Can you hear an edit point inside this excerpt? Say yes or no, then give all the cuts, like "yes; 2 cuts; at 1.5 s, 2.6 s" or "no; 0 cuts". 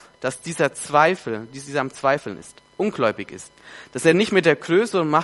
no; 0 cuts